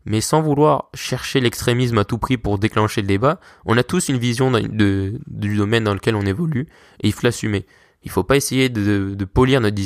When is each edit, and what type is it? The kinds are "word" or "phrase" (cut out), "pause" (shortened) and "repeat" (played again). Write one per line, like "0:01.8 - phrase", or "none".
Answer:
0:07.2 - word